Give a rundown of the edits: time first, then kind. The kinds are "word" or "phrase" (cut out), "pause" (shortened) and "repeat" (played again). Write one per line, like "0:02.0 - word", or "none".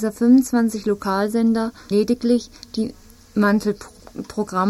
0:01.9 - phrase